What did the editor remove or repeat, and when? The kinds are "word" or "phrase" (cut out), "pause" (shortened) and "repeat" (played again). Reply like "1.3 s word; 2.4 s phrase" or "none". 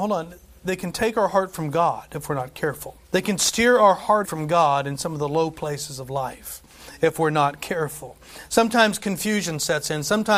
3.0 s pause; 4.2 s word